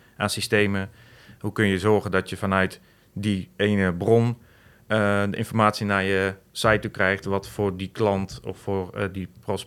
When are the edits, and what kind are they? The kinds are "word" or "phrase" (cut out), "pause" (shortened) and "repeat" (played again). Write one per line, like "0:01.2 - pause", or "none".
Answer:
none